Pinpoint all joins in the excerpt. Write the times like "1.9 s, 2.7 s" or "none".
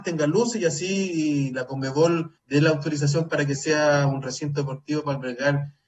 2.4 s

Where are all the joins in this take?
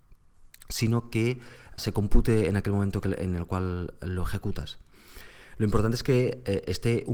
1.8 s

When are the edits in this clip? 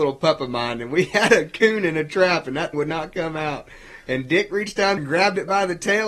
2.7 s, 5.0 s

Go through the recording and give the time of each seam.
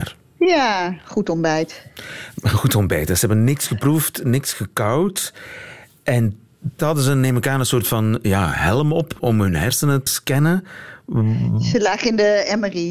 6.8 s, 9.2 s, 10.1 s

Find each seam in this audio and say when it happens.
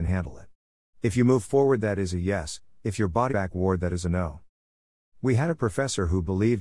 3.3 s

